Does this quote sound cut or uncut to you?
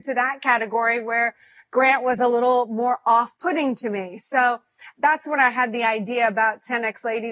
uncut